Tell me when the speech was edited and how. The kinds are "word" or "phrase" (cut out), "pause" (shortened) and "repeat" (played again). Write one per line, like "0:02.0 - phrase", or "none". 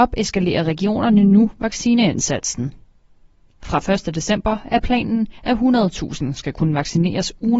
none